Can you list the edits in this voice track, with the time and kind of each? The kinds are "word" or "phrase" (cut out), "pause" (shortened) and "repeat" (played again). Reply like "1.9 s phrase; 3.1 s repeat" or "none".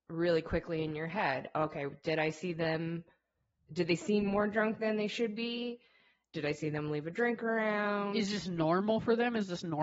none